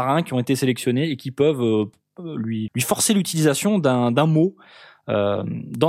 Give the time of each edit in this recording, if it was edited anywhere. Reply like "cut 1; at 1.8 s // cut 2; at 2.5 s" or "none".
cut 1; at 2.7 s